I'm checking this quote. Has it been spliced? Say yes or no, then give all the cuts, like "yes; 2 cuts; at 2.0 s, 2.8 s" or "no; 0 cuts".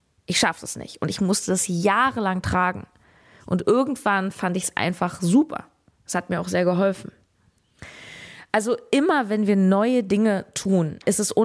no; 0 cuts